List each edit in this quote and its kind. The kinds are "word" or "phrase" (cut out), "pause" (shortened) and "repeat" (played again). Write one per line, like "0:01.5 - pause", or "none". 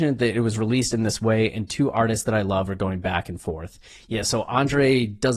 none